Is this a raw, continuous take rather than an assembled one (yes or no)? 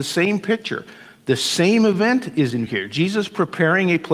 no